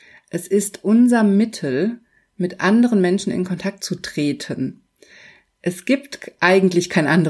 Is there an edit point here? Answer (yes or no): no